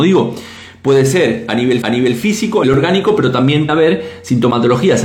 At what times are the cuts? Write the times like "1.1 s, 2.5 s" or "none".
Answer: 1.8 s, 2.6 s, 3.7 s